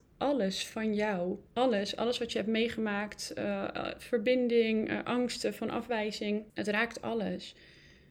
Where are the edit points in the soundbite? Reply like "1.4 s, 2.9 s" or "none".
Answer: 1.5 s, 6.5 s